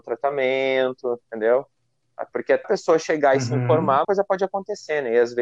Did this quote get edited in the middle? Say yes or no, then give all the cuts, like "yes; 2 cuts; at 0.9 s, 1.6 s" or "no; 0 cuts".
yes; 3 cuts; at 1.2 s, 2.6 s, 4.0 s